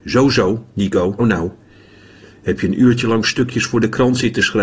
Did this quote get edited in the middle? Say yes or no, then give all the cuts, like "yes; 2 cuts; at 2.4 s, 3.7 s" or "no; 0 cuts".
yes; 1 cut; at 1.2 s